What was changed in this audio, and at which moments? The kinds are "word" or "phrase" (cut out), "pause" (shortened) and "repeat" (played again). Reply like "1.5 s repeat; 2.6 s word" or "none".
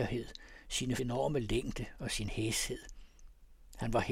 1.0 s word